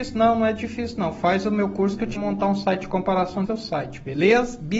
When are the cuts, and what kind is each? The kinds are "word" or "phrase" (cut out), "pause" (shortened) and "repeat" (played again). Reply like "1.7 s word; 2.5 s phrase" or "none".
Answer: 2.2 s word; 3.5 s phrase